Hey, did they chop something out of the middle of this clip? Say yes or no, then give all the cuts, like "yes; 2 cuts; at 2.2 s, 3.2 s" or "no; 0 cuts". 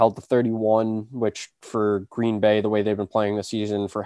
no; 0 cuts